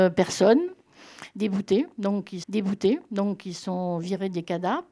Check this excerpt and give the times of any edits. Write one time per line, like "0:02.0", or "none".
0:02.4